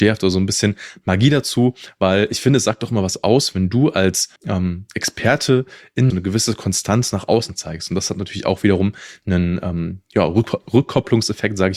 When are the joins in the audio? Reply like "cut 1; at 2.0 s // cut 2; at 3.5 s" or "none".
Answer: cut 1; at 4.4 s // cut 2; at 6.1 s